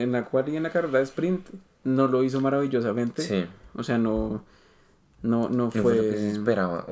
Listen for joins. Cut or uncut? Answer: uncut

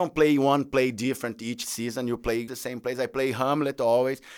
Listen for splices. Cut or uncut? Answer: cut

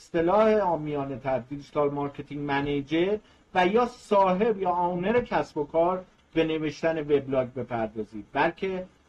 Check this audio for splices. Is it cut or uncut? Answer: uncut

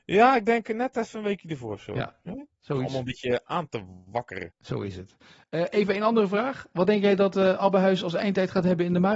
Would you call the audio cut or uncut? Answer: uncut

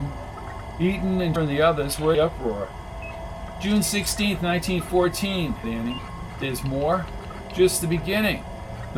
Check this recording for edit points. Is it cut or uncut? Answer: cut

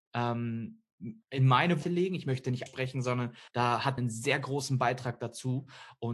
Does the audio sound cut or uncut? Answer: cut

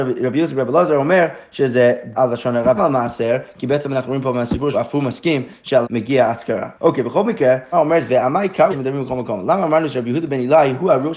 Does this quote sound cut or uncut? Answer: cut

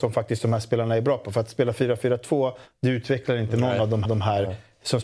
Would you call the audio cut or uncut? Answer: cut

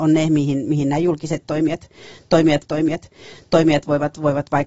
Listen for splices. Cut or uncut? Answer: cut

